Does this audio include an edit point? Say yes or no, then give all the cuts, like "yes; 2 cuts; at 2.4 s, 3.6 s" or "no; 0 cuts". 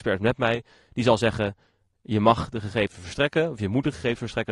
no; 0 cuts